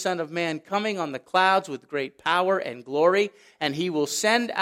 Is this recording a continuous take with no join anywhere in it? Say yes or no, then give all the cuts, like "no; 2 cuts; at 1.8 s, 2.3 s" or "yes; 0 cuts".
yes; 0 cuts